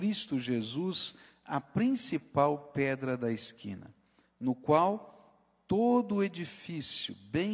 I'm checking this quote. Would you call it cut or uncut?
uncut